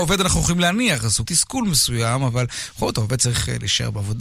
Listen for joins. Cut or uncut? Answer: cut